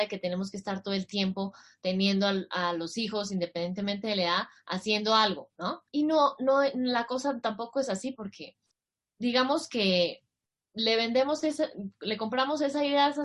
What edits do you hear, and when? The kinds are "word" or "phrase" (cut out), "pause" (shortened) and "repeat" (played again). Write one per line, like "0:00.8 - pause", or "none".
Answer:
0:05.9 - pause
0:08.7 - pause